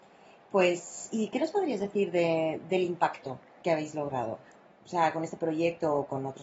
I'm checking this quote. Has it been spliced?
no; 0 cuts

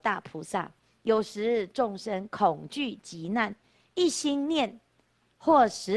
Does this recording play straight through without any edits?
yes; 0 cuts

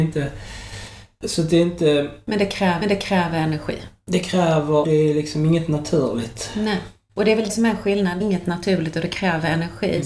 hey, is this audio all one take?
no; 4 cuts; at 2.8 s, 4.8 s, 7.5 s, 8.2 s

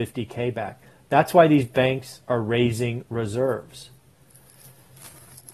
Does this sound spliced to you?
no; 0 cuts

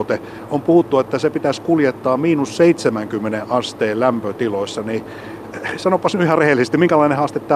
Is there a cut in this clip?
no; 0 cuts

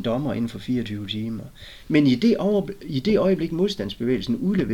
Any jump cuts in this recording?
no; 0 cuts

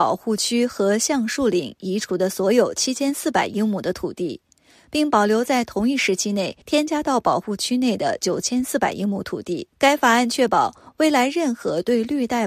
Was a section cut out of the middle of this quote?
yes; 2 cuts; at 6.6 s, 9.7 s

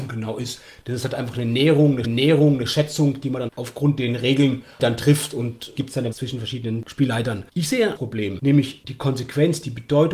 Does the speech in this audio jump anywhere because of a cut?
yes; 6 cuts; at 2.0 s, 3.5 s, 5.8 s, 6.1 s, 7.5 s, 8.0 s

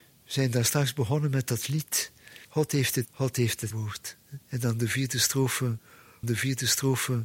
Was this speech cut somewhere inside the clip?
yes; 5 cuts; at 2.4 s, 3.0 s, 3.7 s, 4.4 s, 6.2 s

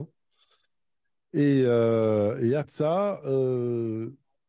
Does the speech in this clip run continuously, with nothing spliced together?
no; 1 cut; at 2.6 s

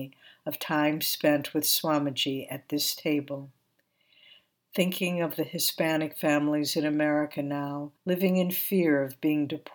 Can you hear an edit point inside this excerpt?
yes; 1 cut; at 8.0 s

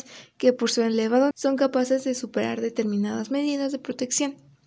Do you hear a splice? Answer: yes; 1 cut; at 1.3 s

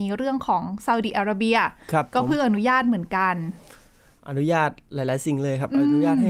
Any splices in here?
no; 0 cuts

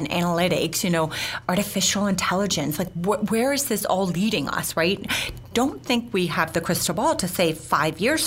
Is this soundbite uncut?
yes; 0 cuts

